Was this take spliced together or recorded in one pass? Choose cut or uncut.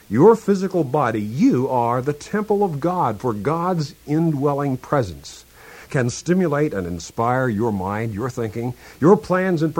uncut